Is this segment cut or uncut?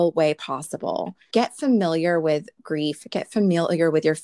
cut